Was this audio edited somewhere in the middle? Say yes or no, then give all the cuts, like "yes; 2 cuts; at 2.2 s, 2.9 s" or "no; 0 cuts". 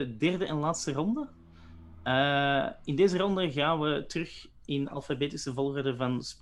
no; 0 cuts